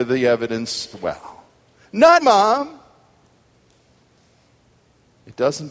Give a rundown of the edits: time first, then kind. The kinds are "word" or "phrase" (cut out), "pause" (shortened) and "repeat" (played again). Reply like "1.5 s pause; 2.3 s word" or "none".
0.9 s word; 2.2 s word